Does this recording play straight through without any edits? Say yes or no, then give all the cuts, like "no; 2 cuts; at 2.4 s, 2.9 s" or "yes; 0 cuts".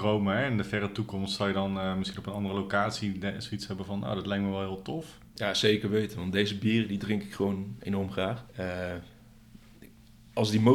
no; 1 cut; at 8.5 s